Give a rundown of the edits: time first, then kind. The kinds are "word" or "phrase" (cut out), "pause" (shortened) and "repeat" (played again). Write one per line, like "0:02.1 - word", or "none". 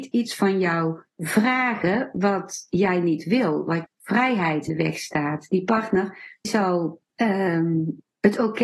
0:01.1 - pause
0:03.8 - word
0:04.7 - word
0:06.4 - word
0:07.1 - pause